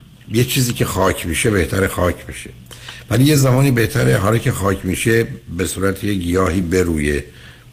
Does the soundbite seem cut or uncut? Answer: uncut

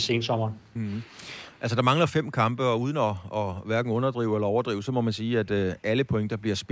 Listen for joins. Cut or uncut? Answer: uncut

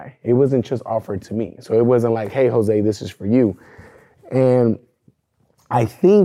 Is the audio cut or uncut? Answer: uncut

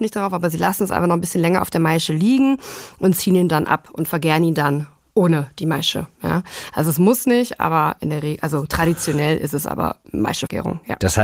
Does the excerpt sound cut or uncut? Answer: uncut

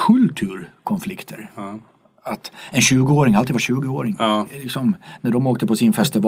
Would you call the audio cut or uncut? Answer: uncut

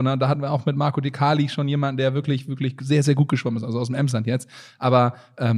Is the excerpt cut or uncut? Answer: uncut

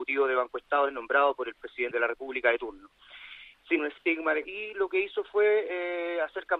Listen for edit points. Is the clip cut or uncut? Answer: cut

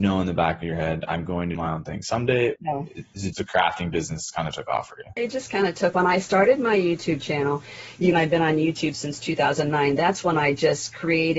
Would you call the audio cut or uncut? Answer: cut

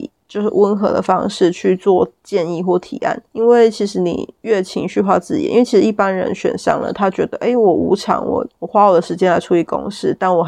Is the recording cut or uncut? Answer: cut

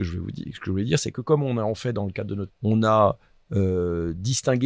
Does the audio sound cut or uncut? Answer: cut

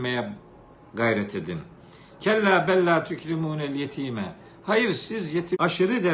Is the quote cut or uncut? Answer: uncut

